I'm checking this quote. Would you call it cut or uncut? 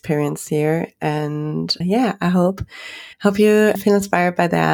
cut